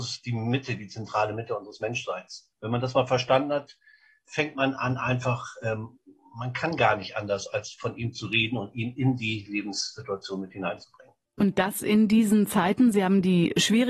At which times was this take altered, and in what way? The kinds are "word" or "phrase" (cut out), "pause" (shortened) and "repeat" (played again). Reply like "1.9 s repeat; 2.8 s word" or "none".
none